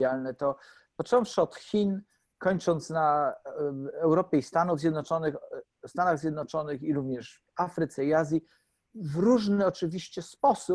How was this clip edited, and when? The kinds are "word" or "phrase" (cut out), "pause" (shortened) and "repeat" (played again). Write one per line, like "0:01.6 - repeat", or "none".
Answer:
none